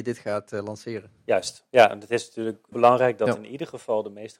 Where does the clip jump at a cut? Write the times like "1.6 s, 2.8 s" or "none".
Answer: 1.2 s, 2.7 s